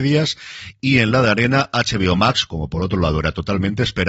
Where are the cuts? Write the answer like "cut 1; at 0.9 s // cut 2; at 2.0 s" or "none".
none